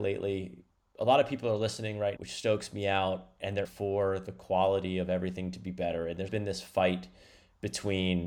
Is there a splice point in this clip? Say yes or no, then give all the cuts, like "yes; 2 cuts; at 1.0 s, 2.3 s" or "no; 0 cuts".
yes; 3 cuts; at 2.2 s, 3.6 s, 6.3 s